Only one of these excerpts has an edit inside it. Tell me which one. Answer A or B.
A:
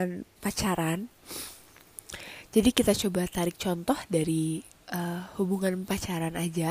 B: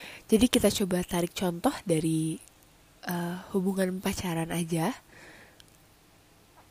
A